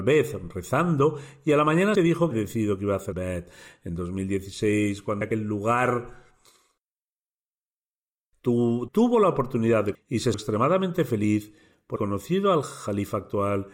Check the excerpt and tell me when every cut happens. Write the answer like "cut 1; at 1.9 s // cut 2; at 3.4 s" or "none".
cut 1; at 2.0 s // cut 2; at 2.3 s // cut 3; at 3.1 s // cut 4; at 5.2 s // cut 5; at 8.9 s // cut 6; at 9.9 s // cut 7; at 10.3 s // cut 8; at 12.0 s